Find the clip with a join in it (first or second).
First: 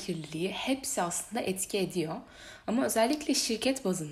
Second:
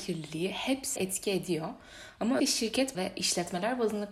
second